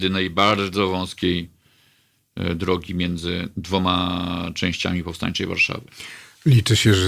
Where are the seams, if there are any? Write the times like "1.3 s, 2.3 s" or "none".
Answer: none